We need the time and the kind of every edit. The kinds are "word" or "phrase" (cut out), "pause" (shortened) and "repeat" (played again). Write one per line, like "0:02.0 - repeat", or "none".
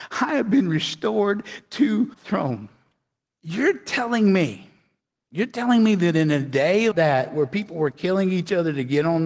0:02.1 - word
0:03.2 - pause
0:05.0 - pause
0:06.9 - word